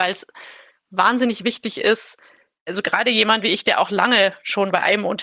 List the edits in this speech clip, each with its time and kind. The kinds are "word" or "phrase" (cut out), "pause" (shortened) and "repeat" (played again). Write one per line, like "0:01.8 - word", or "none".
none